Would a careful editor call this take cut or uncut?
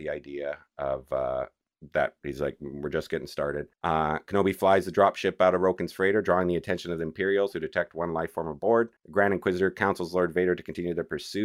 cut